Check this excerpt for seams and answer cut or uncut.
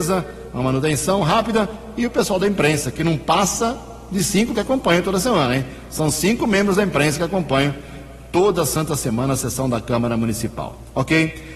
cut